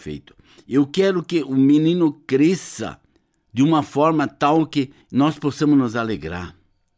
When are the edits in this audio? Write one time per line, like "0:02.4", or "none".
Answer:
0:03.1
0:05.0